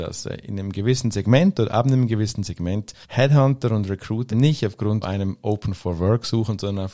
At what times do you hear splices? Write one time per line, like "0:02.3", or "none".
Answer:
0:03.0
0:04.3
0:05.0